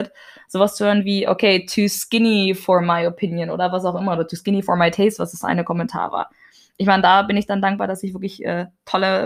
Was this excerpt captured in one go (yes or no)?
yes